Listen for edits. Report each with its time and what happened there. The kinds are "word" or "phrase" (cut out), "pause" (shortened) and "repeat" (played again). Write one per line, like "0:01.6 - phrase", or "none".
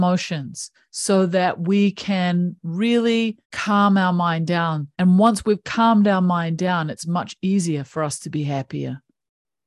0:03.4 - pause
0:04.9 - pause